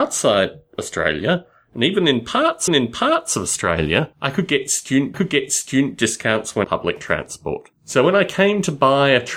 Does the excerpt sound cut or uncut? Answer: cut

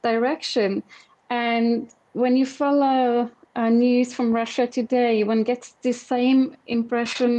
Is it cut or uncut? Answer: uncut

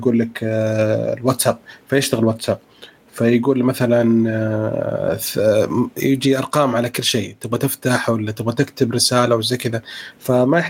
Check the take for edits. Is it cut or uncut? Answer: uncut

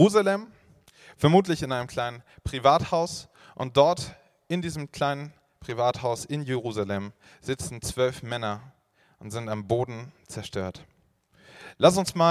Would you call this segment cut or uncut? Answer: uncut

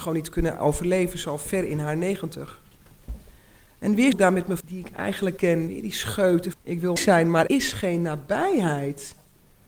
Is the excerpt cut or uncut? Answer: cut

